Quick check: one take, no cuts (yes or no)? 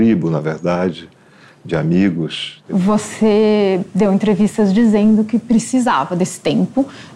yes